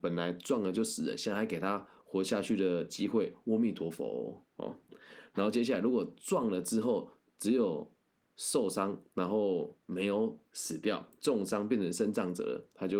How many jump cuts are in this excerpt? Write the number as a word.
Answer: one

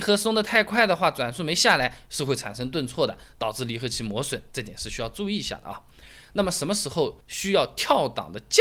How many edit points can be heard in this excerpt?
one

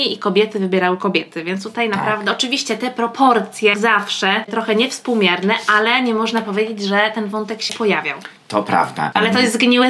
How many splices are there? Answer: three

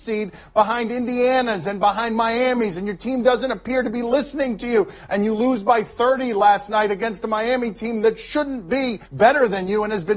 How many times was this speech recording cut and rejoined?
one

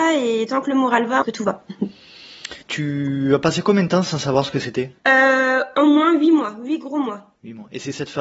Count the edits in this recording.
three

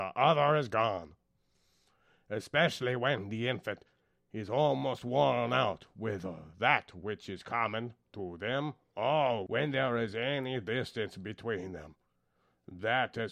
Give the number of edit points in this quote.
zero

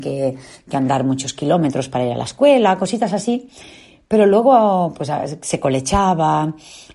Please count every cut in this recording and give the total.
zero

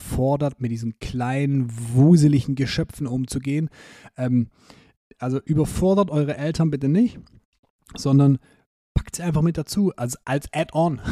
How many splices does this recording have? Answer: zero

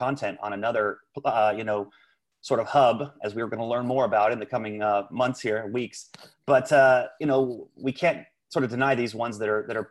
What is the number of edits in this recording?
zero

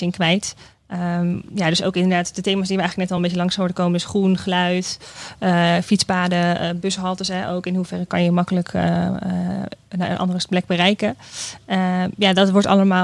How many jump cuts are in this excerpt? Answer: zero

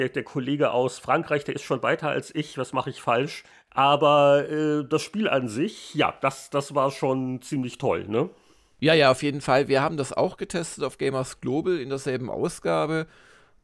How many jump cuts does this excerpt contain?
one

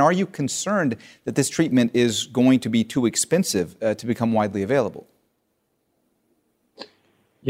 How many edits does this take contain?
zero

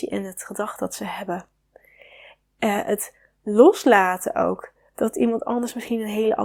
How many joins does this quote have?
zero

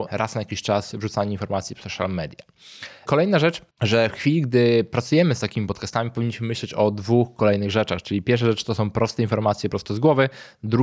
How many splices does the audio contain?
one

